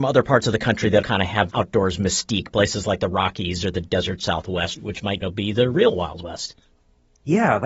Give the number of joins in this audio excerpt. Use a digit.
4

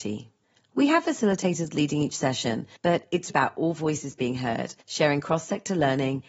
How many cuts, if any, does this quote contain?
3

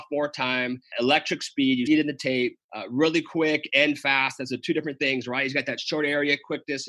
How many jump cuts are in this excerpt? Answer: 3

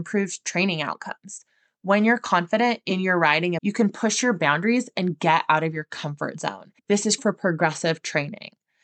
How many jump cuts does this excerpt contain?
3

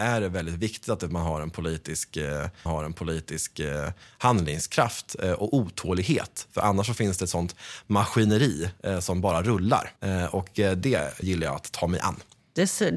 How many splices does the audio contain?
3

